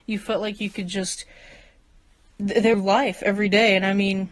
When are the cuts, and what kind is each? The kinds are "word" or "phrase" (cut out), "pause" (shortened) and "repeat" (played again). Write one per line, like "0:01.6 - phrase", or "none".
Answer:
0:02.7 - phrase